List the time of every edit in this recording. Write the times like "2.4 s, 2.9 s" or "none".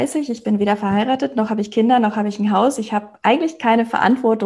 none

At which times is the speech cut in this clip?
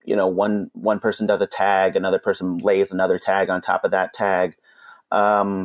none

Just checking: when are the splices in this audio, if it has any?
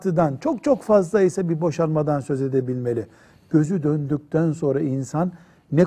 none

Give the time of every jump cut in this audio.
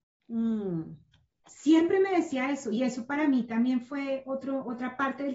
none

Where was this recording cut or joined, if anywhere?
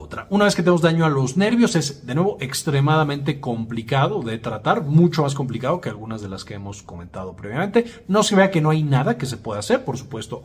none

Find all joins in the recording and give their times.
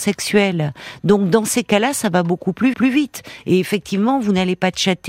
2.7 s

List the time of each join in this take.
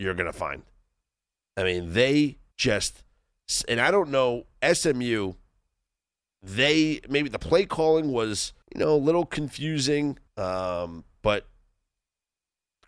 2.5 s, 8.6 s, 10.3 s

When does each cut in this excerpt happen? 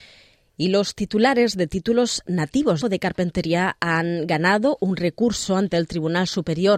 2.8 s

